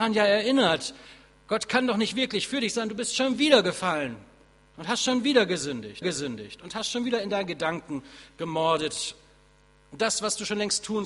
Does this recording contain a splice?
yes; 1 cut; at 6.0 s

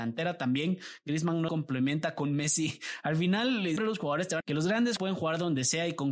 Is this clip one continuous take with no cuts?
no; 4 cuts; at 1.5 s, 3.8 s, 4.4 s, 5.0 s

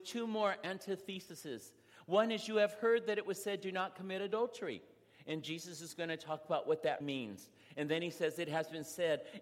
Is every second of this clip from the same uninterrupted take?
no; 1 cut; at 7.0 s

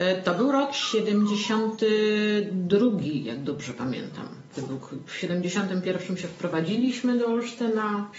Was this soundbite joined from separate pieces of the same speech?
no; 0 cuts

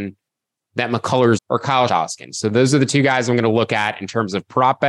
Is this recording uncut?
no; 2 cuts; at 1.4 s, 1.9 s

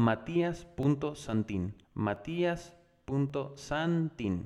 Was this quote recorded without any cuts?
no; 1 cut; at 1.8 s

